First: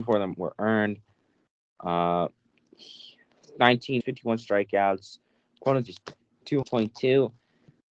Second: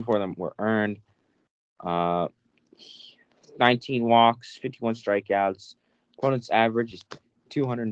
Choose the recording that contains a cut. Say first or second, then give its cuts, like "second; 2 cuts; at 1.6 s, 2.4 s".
first; 3 cuts; at 4.0 s, 5.9 s, 6.6 s